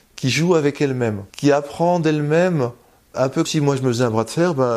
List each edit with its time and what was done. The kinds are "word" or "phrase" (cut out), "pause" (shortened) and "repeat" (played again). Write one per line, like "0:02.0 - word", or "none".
0:01.3 - pause
0:03.1 - word
0:03.4 - word